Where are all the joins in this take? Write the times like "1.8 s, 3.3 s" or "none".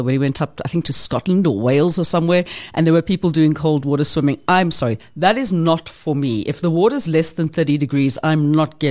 none

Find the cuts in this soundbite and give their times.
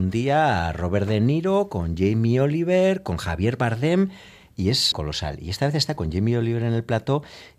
4.9 s

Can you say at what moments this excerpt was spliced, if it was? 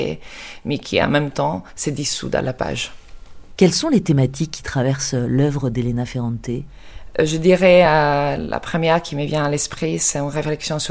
none

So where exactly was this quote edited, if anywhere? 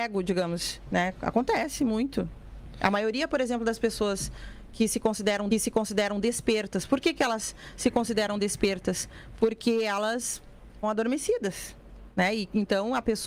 5.5 s, 10.8 s

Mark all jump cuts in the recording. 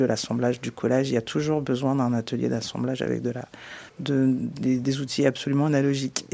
3.9 s

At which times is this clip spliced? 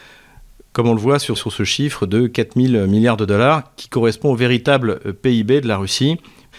1.4 s

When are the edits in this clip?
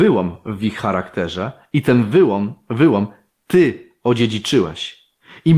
none

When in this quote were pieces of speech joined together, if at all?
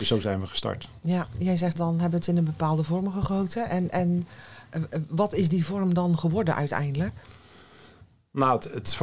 1.8 s

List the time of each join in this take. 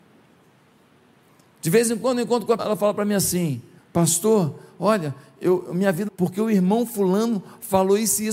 2.6 s, 3.8 s, 6.1 s

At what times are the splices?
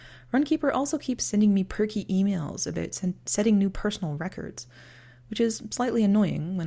none

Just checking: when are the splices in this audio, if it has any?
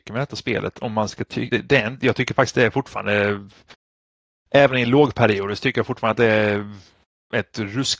1.5 s

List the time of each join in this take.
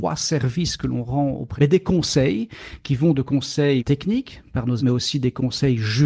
1.6 s, 3.8 s, 4.8 s

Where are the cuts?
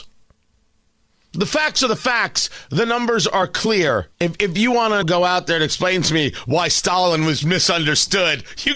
4.1 s, 5.0 s, 7.4 s

